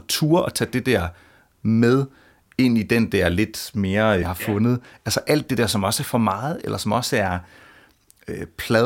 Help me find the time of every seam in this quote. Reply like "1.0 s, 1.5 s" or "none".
4.2 s